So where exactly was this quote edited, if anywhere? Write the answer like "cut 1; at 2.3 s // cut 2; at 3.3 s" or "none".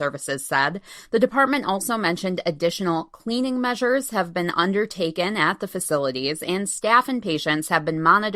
none